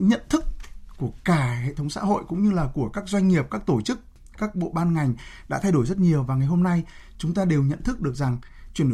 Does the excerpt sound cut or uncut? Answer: uncut